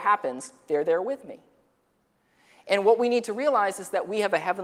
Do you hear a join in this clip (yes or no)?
no